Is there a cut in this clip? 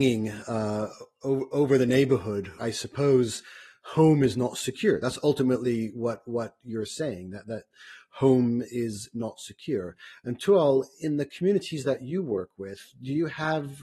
yes; 1 cut; at 2.6 s

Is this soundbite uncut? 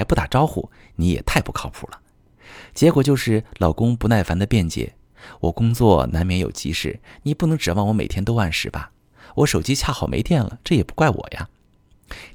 yes; 0 cuts

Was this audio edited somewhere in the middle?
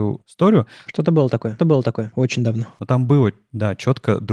yes; 1 cut; at 1.6 s

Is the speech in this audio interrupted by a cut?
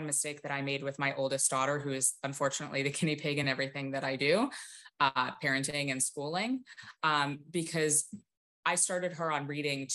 no; 0 cuts

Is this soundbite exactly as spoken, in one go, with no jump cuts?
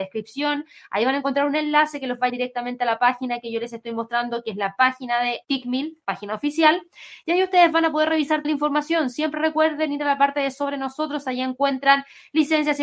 no; 3 cuts; at 2.3 s, 5.4 s, 8.4 s

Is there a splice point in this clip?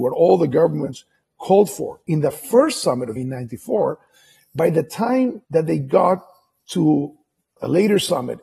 yes; 2 cuts; at 3.2 s, 5.4 s

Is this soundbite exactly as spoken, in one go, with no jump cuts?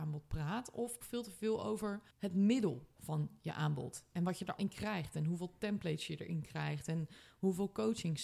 no; 3 cuts; at 1.0 s, 2.1 s, 4.6 s

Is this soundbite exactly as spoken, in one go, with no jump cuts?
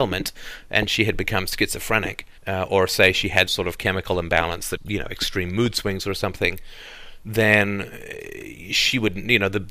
no; 3 cuts; at 2.4 s, 3.5 s, 4.8 s

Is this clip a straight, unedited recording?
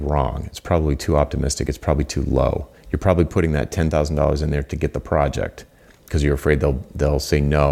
yes; 0 cuts

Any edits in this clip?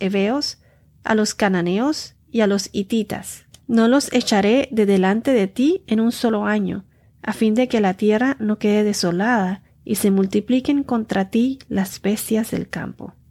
no; 0 cuts

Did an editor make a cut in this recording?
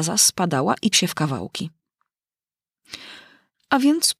yes; 1 cut; at 0.9 s

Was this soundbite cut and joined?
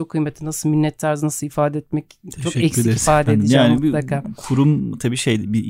no; 0 cuts

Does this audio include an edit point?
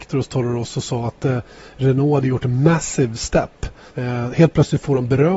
yes; 1 cut; at 3.9 s

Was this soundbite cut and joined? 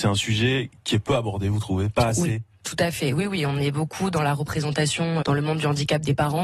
yes; 1 cut; at 5.2 s

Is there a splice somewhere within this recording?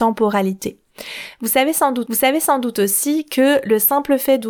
yes; 1 cut; at 2.1 s

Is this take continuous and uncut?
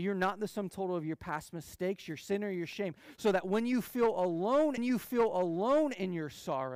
no; 1 cut; at 4.8 s

